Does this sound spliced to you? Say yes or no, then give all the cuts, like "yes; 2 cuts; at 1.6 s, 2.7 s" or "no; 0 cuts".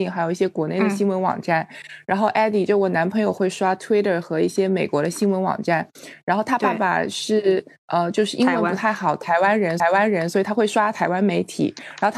yes; 1 cut; at 9.8 s